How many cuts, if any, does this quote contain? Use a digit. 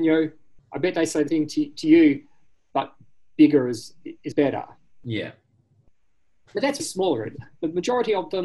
3